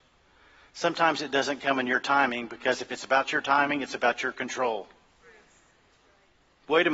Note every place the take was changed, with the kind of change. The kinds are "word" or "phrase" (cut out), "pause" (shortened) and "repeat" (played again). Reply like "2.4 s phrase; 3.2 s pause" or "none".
none